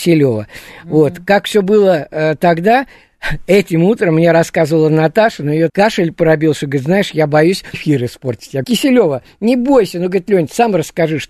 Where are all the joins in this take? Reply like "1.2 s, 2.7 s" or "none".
5.7 s, 7.7 s, 8.6 s